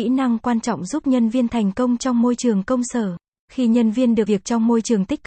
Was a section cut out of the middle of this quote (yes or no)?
yes